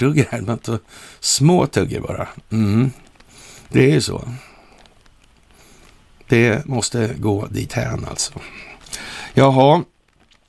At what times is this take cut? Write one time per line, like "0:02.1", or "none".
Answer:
none